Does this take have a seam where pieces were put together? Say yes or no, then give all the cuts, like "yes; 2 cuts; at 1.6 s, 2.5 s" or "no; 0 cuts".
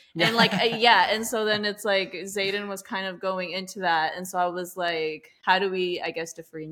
no; 0 cuts